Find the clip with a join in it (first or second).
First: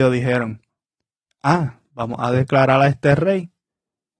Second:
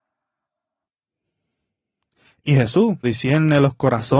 second